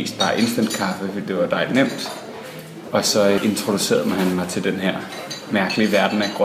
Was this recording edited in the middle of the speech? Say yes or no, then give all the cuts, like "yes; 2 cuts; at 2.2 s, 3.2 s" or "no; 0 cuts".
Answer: yes; 1 cut; at 3.4 s